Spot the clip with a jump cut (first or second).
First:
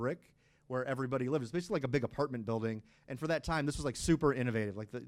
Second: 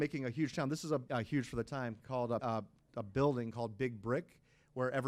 second